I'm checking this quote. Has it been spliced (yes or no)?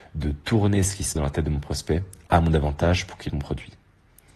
yes